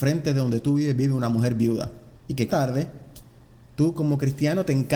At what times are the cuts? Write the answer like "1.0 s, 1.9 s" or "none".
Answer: 2.2 s, 2.5 s